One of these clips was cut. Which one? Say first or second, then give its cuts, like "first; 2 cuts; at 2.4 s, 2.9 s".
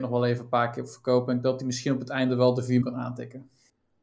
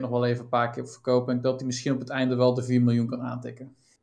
first; 1 cut; at 2.8 s